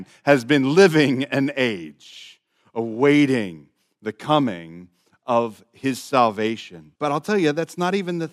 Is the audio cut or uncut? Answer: cut